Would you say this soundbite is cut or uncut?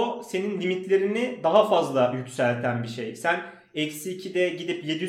uncut